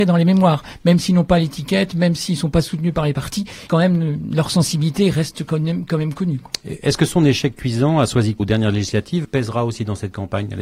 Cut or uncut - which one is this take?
cut